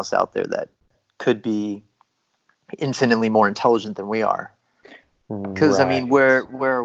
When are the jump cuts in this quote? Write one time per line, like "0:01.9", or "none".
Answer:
none